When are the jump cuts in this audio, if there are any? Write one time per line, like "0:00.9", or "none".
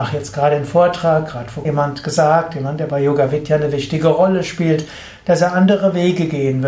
0:01.6